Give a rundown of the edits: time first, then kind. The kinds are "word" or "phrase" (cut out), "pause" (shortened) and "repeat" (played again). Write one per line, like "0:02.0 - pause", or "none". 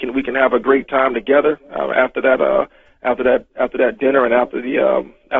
none

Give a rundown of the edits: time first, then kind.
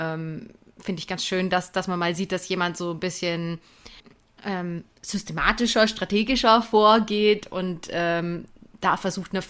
none

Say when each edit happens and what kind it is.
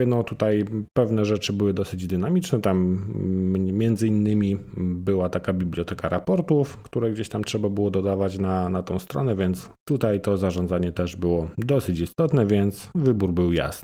0:09.8 - pause

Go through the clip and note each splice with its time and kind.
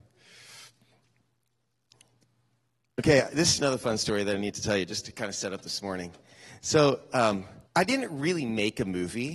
0:03.6 - word
0:07.7 - pause

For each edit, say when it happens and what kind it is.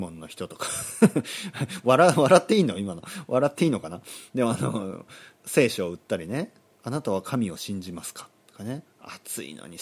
0:05.4 - pause

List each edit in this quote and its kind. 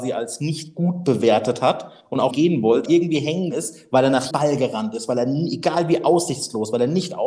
0:02.3 - word
0:02.9 - word
0:03.5 - word
0:04.3 - word

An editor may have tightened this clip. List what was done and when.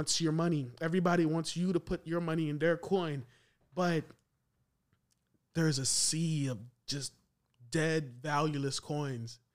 none

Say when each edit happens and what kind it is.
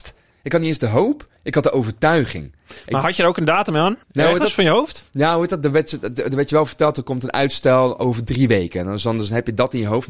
0:01.4 - pause
0:04.0 - pause

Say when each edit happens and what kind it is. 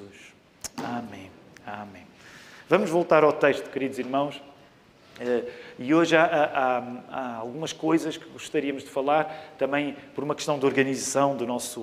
none

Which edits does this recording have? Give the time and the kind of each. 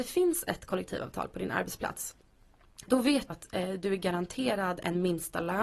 0:02.9 - word
0:03.3 - word

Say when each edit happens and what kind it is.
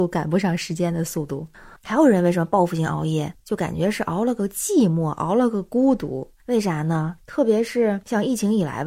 0:01.8 - pause
0:06.4 - pause

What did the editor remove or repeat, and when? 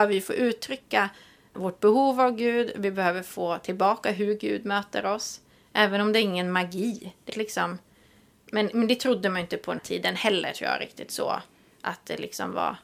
0:01.5 - word
0:07.3 - word
0:09.8 - word

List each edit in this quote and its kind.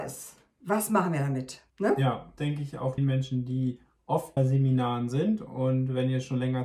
0:01.7 - pause
0:02.4 - phrase
0:03.0 - phrase
0:04.4 - word

